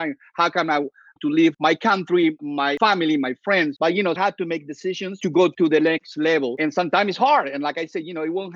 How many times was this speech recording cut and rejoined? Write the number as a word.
three